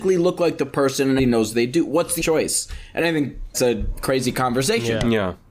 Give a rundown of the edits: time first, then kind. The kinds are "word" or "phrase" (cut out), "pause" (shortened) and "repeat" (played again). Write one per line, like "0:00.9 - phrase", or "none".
0:01.2 - word
0:02.2 - word
0:03.5 - word